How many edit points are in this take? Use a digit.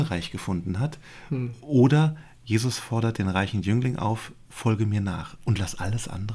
0